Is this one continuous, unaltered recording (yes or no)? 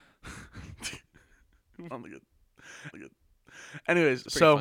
no